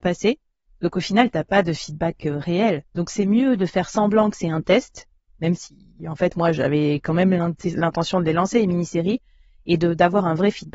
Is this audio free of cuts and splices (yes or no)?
yes